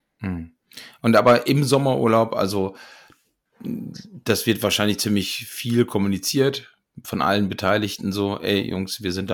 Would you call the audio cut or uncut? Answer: uncut